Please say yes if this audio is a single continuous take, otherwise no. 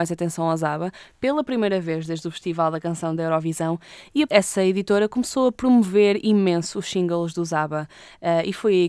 no